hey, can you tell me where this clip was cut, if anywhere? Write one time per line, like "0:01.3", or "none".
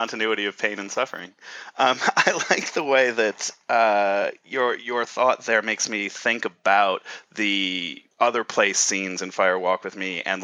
0:08.1

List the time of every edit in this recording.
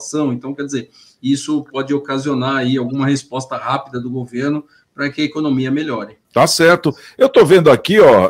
0:06.2

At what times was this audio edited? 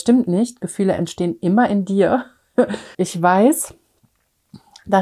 0:02.9

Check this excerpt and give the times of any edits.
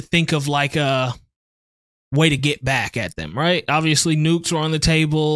none

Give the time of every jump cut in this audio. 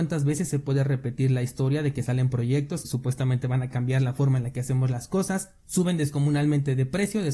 0:02.8

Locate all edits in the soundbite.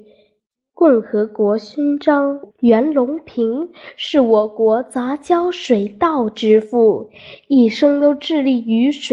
0:02.5

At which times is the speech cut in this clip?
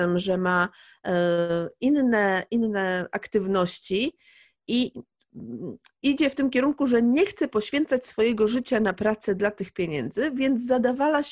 none

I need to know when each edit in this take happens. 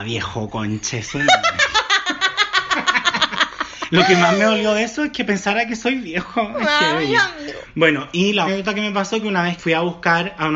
0:08.5
0:09.6

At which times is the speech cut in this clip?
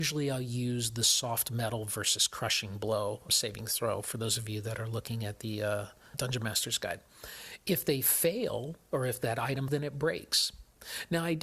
0:03.3
0:06.1
0:09.7

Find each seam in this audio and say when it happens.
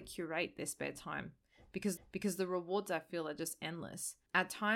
0:02.0

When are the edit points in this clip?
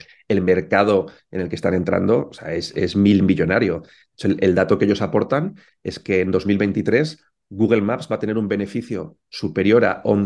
none

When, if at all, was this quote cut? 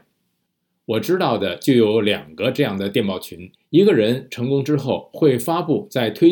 0:03.5

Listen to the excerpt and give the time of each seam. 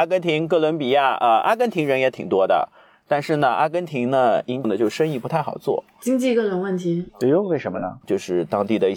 0:04.6
0:07.1

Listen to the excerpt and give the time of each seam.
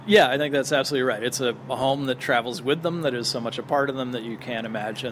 none

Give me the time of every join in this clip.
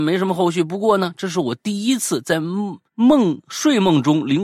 0:02.9

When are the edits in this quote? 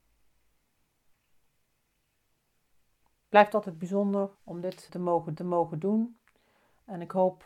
0:04.3
0:04.9
0:05.4

